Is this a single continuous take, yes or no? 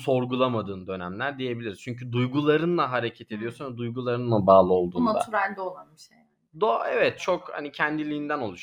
yes